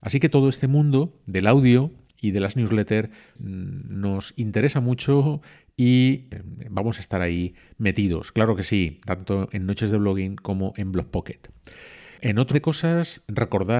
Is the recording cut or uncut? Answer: cut